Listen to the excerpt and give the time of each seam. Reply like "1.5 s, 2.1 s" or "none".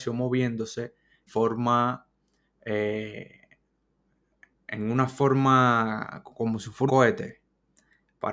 1.3 s, 6.9 s